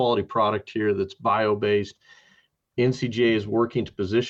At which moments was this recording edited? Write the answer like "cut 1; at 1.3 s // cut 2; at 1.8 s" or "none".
none